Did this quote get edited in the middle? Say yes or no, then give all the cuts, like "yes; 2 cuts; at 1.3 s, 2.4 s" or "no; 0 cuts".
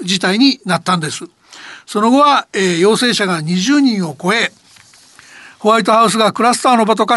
no; 0 cuts